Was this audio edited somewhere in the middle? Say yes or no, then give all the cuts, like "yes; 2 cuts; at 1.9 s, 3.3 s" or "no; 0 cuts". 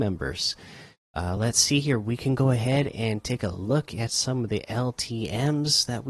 no; 0 cuts